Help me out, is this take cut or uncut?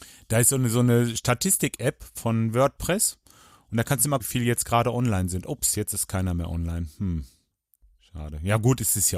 cut